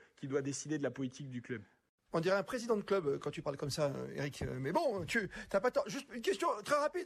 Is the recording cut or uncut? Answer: uncut